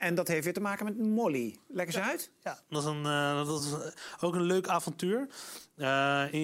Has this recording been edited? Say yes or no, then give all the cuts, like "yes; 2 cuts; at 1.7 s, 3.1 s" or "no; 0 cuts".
no; 0 cuts